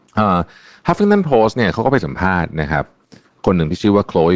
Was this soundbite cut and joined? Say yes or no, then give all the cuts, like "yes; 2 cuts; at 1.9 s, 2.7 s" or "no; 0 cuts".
no; 0 cuts